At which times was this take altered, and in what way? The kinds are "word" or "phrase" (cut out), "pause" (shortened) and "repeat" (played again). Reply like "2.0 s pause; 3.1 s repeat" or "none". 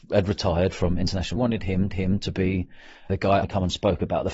1.4 s phrase; 1.9 s repeat; 3.1 s word; 3.4 s word